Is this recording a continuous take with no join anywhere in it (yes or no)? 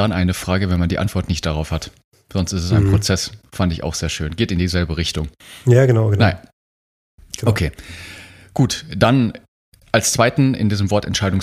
yes